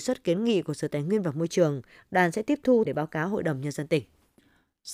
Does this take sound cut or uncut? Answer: cut